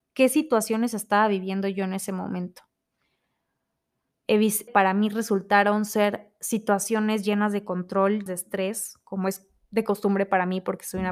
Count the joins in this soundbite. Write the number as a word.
two